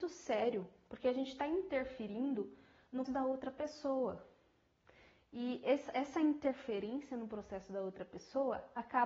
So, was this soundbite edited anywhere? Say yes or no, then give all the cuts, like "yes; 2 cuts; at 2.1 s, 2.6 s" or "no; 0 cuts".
yes; 1 cut; at 3.1 s